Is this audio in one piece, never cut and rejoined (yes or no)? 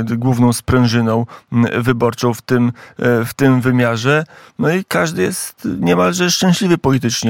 yes